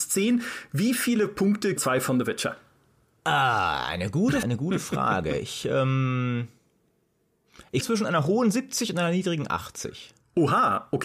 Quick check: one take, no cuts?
no; 3 cuts; at 1.8 s, 4.4 s, 7.8 s

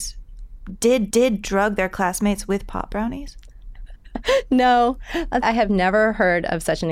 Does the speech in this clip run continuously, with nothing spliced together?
no; 2 cuts; at 1.1 s, 5.4 s

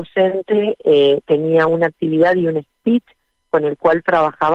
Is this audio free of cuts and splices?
yes; 0 cuts

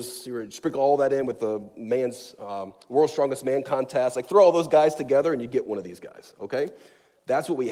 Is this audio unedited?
yes; 0 cuts

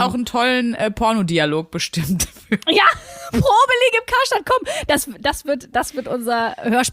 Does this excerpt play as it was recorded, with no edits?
yes; 0 cuts

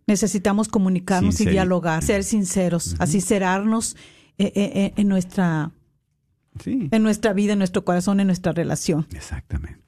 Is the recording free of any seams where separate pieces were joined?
no; 1 cut; at 2.0 s

